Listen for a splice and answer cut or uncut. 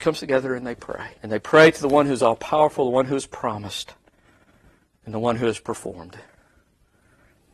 cut